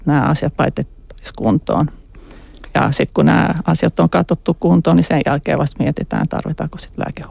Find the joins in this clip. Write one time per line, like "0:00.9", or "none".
none